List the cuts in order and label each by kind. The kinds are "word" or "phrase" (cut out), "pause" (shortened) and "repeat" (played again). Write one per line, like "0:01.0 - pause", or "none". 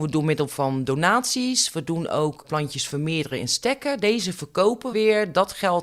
0:02.4 - word
0:04.9 - word